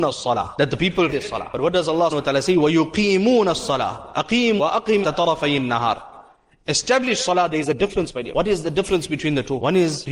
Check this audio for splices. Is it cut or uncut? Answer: cut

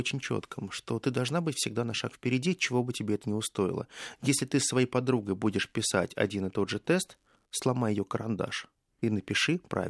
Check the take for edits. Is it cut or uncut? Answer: uncut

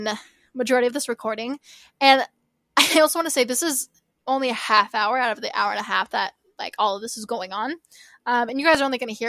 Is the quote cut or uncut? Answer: uncut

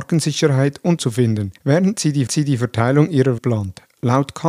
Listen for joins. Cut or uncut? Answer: cut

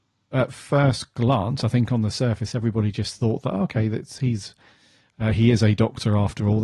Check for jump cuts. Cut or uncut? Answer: uncut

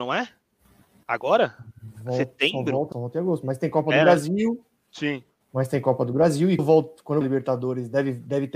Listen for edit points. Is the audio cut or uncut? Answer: cut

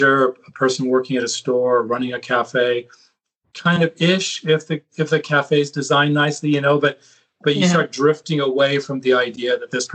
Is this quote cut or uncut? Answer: uncut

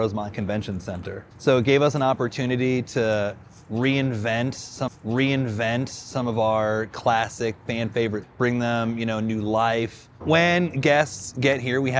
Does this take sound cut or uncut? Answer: cut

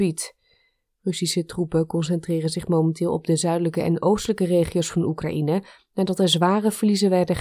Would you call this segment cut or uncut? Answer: uncut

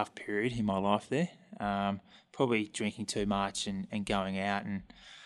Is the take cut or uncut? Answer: uncut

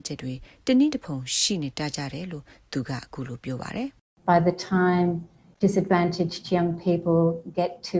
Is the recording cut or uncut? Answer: uncut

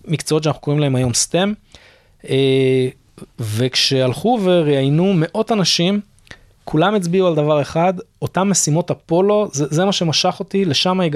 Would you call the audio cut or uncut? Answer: uncut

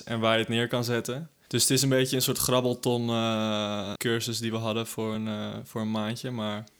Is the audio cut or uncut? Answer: uncut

